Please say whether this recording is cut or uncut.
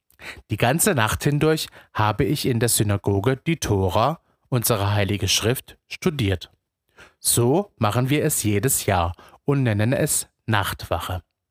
uncut